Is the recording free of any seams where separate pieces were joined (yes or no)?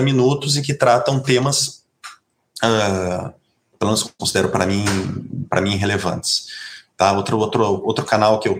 yes